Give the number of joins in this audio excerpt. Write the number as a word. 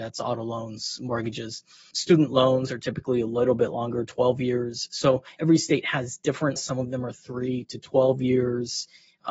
three